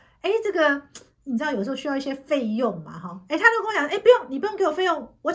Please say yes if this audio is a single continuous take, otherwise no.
yes